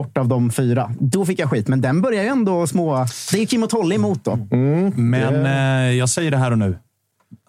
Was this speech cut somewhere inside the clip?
no; 0 cuts

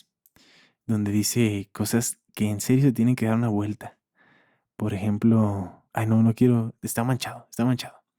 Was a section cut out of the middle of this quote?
yes; 1 cut; at 5.9 s

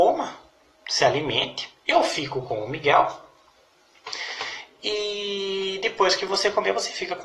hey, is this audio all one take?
yes; 0 cuts

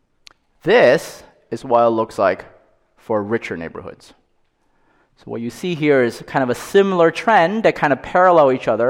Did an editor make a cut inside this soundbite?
no; 0 cuts

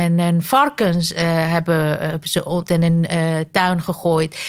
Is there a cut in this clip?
yes; 1 cut; at 2.7 s

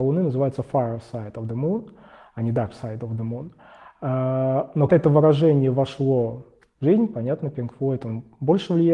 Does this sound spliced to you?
yes; 1 cut; at 4.9 s

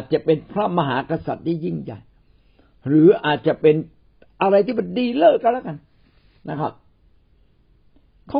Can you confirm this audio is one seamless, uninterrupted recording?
yes; 0 cuts

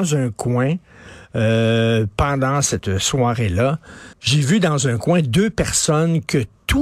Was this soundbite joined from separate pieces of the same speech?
yes; 1 cut; at 4.1 s

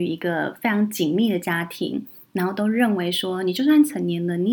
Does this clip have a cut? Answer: no; 0 cuts

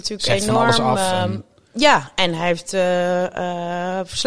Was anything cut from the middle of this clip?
no; 0 cuts

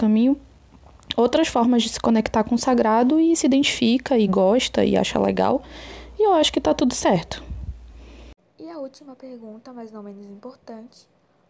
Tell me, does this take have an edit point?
no; 0 cuts

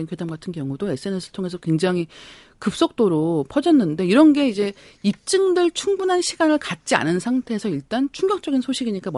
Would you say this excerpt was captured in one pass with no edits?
yes; 0 cuts

